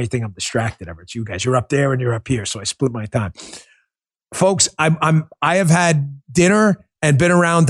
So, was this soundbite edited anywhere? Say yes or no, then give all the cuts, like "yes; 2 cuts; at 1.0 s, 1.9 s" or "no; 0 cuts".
no; 0 cuts